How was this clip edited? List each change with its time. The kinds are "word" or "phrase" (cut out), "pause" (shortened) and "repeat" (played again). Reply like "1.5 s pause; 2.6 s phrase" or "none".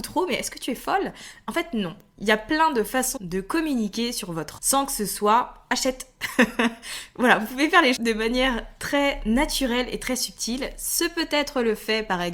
3.2 s word; 4.6 s word; 8.0 s word